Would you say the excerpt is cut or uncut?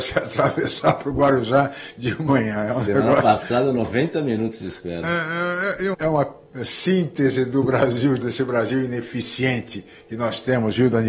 cut